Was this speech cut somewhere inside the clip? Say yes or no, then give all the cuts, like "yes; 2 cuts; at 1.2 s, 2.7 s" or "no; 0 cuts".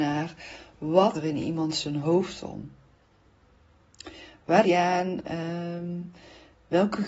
yes; 2 cuts; at 1.1 s, 4.6 s